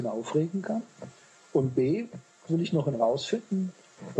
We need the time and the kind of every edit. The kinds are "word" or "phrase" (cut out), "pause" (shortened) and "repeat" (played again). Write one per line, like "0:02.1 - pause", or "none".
0:02.5 - word
0:02.9 - word